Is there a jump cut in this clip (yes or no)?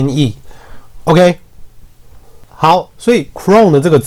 no